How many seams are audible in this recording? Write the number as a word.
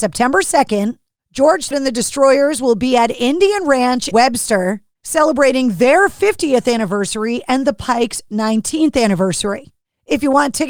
two